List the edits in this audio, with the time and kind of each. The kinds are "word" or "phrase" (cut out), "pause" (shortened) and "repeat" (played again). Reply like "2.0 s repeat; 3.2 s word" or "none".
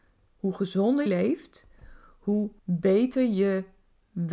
1.1 s phrase; 2.6 s pause